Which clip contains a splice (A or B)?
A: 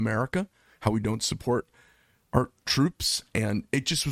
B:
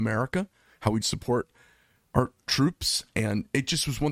B